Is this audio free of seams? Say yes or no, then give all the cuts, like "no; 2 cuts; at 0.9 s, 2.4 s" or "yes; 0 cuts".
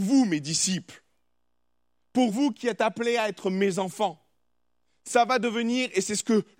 yes; 0 cuts